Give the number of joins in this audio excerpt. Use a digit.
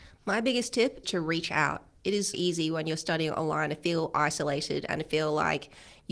2